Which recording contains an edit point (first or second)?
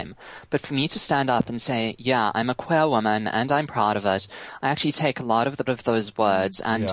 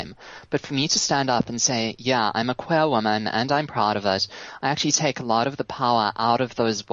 first